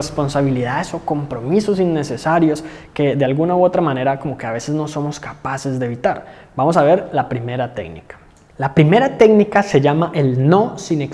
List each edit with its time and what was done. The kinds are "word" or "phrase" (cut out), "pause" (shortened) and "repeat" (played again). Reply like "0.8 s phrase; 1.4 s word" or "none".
none